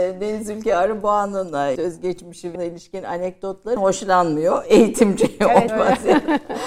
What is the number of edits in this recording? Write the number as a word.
four